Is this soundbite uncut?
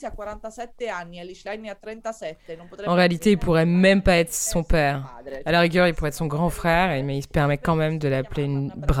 yes; 0 cuts

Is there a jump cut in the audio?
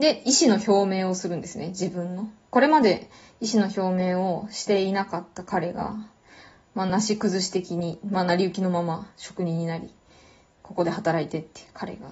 no; 0 cuts

